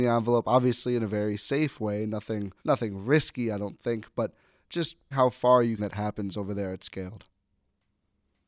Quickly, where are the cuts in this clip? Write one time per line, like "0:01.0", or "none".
0:02.6
0:05.1
0:05.8